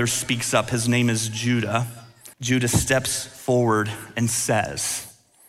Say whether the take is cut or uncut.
cut